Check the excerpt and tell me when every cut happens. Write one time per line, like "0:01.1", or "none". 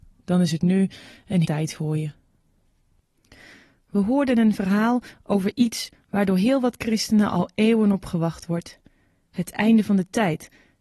0:01.4